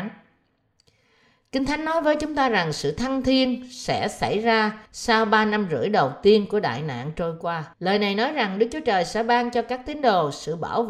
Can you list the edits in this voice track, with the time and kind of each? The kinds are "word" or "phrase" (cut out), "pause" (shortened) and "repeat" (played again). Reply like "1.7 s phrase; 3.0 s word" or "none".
4.9 s pause; 7.7 s pause